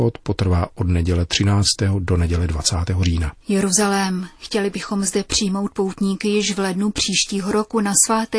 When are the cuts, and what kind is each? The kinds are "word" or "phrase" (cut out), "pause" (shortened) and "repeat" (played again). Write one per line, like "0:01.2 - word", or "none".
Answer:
0:03.4 - pause